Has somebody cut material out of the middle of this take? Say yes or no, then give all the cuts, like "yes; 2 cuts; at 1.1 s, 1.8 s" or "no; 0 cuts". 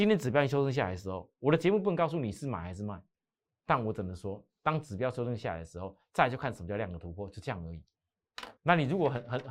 yes; 2 cuts; at 3.4 s, 8.6 s